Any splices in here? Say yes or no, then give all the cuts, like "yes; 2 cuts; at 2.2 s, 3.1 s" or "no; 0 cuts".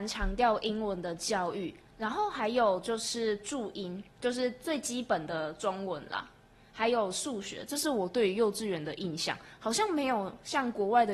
yes; 2 cuts; at 1.9 s, 4.1 s